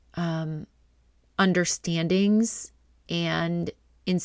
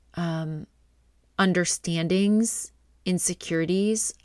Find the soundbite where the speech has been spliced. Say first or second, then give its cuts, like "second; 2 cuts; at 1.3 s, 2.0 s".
second; 1 cut; at 2.9 s